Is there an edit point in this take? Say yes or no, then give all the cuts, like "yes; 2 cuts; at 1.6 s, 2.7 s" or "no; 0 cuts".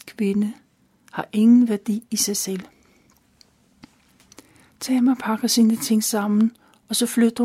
no; 0 cuts